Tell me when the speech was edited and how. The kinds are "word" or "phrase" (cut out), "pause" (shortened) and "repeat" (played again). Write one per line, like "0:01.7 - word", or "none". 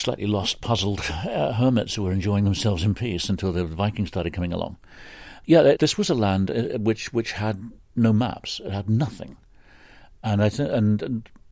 0:05.8 - word